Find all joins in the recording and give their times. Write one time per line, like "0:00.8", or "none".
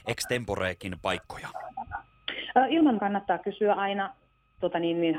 0:03.0